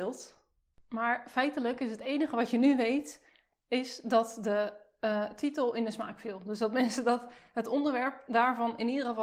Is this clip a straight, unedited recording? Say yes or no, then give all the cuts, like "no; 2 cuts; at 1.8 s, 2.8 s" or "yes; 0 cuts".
yes; 0 cuts